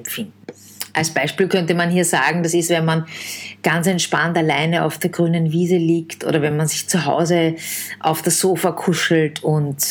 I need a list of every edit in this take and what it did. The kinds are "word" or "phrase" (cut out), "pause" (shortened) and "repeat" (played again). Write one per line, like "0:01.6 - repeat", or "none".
none